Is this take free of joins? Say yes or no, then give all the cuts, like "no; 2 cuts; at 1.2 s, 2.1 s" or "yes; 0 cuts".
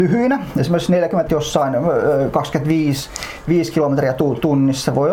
no; 1 cut; at 1.3 s